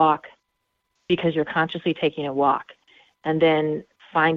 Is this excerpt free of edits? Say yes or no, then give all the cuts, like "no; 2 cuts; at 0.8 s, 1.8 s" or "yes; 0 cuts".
yes; 0 cuts